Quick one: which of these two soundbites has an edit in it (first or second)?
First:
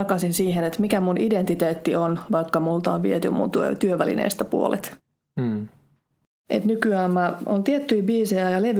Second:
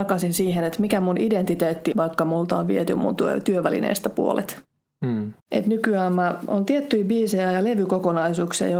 second